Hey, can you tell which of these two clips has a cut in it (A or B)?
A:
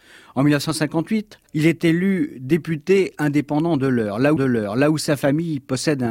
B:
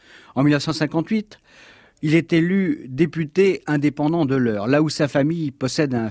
A